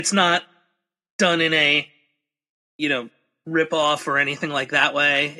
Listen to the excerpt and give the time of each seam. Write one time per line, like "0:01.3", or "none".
none